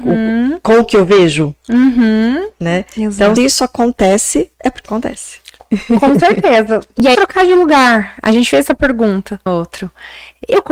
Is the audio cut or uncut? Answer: cut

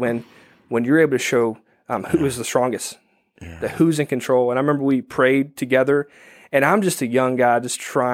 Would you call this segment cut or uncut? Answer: uncut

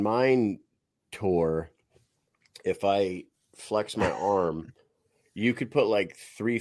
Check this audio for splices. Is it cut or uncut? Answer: uncut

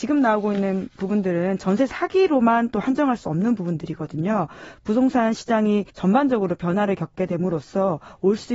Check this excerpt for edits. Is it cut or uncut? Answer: cut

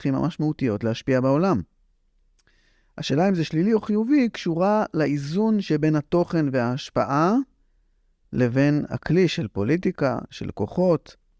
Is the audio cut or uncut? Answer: uncut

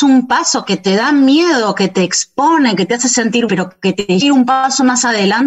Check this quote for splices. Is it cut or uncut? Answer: cut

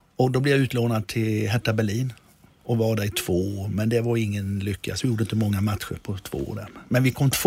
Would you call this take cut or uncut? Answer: uncut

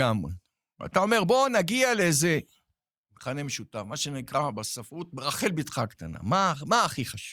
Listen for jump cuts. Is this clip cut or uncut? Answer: uncut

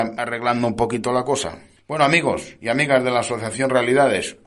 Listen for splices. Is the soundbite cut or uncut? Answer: uncut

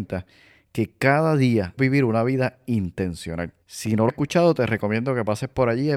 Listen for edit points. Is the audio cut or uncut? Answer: cut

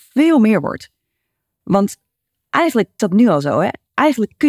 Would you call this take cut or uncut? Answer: cut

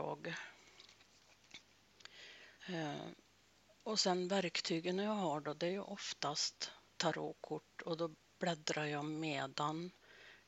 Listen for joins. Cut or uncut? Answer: cut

